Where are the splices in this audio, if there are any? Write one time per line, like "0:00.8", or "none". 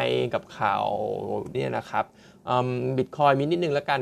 0:01.5